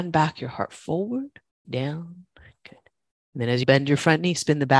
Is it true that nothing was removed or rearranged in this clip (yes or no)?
no